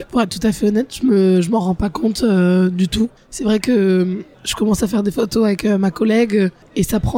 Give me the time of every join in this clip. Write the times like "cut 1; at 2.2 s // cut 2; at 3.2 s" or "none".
none